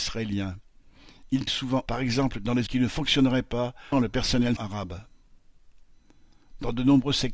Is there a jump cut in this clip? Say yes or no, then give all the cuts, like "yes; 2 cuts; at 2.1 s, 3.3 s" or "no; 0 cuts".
yes; 5 cuts; at 1.5 s, 1.9 s, 2.7 s, 3.9 s, 4.6 s